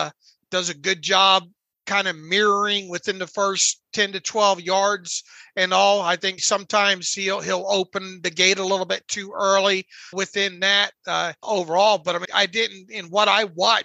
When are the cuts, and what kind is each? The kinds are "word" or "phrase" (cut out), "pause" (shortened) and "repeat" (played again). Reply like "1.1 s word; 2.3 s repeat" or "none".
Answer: 6.4 s word; 10.1 s word; 11.4 s word; 12.2 s word